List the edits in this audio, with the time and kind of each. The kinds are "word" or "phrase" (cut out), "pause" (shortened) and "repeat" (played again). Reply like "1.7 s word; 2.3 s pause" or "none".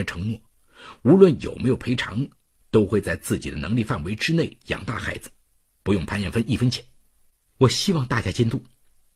none